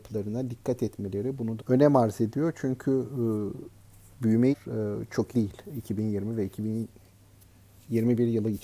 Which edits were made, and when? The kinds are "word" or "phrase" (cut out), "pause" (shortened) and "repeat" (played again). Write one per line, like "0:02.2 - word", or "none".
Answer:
0:01.6 - phrase
0:04.5 - phrase
0:05.3 - word